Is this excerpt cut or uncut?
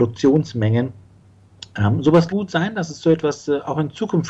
cut